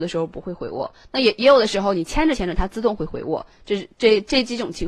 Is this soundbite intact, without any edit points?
yes; 0 cuts

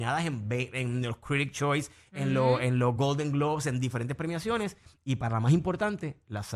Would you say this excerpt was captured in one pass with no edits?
yes; 0 cuts

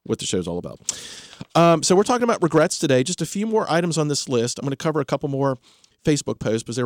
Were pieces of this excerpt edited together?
no; 0 cuts

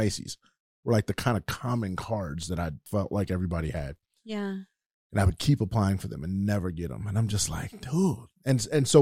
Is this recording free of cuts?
yes; 0 cuts

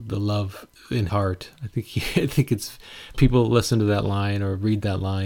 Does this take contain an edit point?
yes; 2 cuts; at 1.1 s, 3.1 s

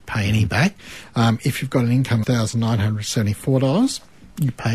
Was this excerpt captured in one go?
no; 1 cut; at 2.2 s

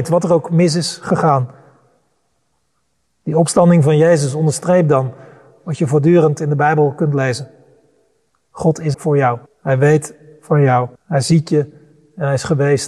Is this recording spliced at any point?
yes; 3 cuts; at 8.9 s, 9.5 s, 10.9 s

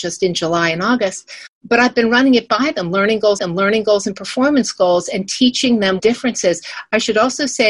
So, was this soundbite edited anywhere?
yes; 2 cuts; at 3.4 s, 6.0 s

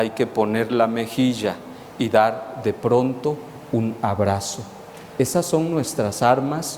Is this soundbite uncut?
yes; 0 cuts

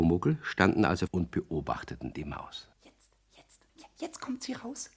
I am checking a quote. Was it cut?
yes; 3 cuts; at 1.1 s, 2.7 s, 3.7 s

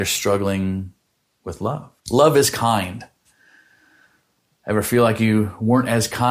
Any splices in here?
yes; 1 cut; at 2.0 s

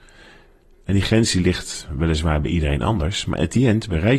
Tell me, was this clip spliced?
no; 0 cuts

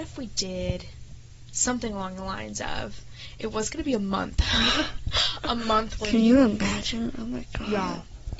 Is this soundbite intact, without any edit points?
yes; 0 cuts

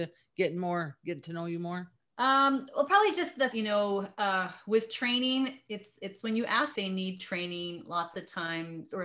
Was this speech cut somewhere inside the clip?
yes; 3 cuts; at 2.0 s, 3.5 s, 6.8 s

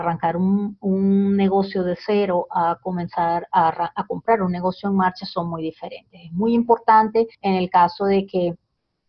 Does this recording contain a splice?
yes; 1 cut; at 7.3 s

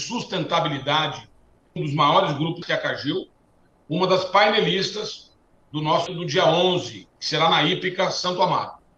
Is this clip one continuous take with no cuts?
no; 4 cuts; at 1.8 s, 2.6 s, 6.1 s, 7.1 s

